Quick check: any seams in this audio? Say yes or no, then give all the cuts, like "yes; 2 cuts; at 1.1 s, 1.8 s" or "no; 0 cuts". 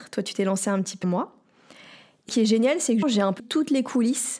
yes; 4 cuts; at 1.0 s, 2.3 s, 3.0 s, 3.4 s